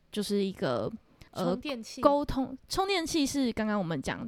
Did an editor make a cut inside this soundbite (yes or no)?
yes